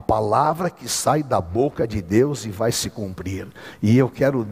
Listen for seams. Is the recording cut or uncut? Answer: uncut